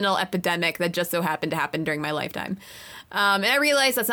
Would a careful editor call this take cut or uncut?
uncut